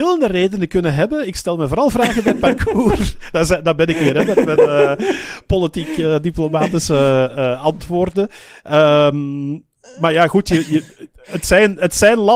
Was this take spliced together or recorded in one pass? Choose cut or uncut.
uncut